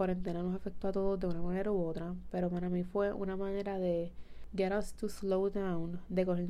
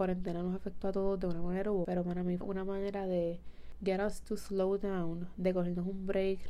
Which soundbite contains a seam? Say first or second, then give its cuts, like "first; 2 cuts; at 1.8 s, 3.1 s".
second; 2 cuts; at 1.8 s, 2.4 s